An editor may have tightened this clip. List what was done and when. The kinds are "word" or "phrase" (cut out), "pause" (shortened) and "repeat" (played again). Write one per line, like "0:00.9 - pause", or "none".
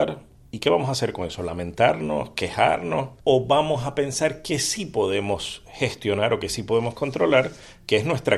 0:03.2 - pause